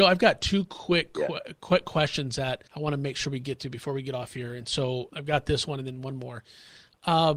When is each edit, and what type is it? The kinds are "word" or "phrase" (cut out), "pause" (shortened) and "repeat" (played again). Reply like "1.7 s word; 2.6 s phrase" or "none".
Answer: 2.7 s pause; 5.1 s word